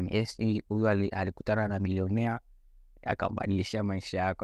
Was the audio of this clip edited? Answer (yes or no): no